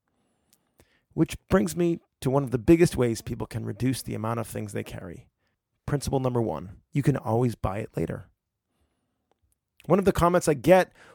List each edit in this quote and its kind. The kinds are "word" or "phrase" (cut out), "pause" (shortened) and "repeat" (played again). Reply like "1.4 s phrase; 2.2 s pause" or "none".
5.5 s pause; 6.9 s pause